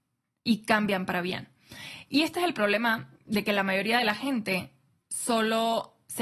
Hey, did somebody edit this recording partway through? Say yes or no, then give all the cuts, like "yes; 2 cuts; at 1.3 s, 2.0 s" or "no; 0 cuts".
yes; 1 cut; at 3.1 s